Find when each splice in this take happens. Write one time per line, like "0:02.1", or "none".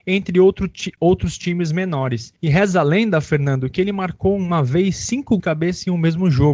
0:02.4
0:05.4